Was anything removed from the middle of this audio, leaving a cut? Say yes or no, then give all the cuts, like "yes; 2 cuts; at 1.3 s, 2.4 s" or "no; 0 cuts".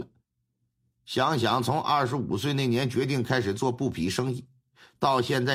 no; 0 cuts